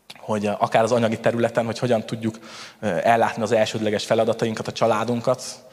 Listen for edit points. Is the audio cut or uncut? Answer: uncut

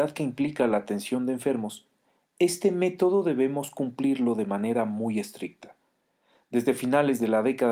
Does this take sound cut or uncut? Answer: uncut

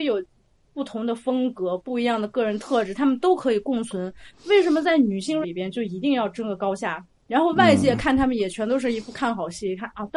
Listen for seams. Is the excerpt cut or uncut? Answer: cut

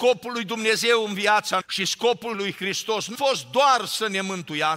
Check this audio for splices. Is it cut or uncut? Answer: cut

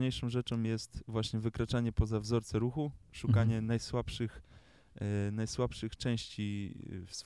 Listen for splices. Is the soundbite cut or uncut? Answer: uncut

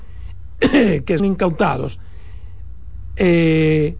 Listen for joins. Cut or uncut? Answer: cut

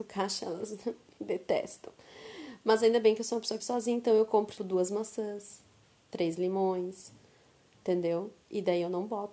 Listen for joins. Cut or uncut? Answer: cut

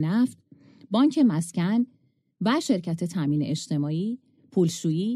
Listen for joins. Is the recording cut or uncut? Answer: uncut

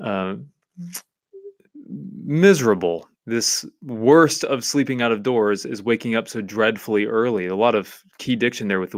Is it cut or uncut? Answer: cut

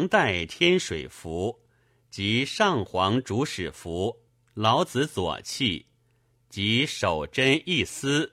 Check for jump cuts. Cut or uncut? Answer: cut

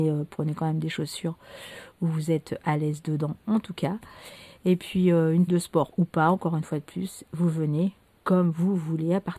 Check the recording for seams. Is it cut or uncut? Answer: cut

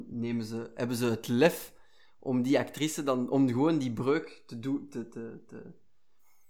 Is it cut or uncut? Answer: uncut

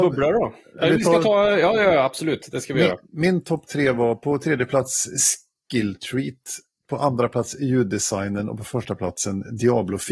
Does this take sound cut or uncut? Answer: uncut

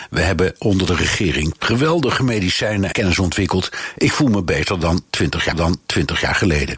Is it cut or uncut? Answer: cut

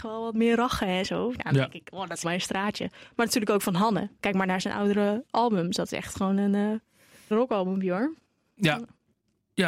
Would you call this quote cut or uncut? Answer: cut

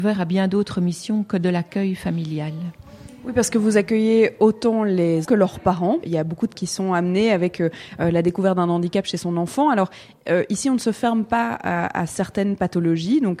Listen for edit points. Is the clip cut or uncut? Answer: cut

